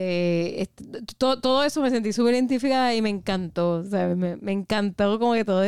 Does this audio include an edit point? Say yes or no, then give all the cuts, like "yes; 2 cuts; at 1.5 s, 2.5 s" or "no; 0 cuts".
no; 0 cuts